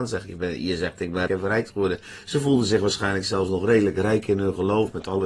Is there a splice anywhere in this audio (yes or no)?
yes